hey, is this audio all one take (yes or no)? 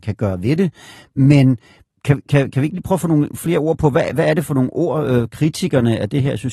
yes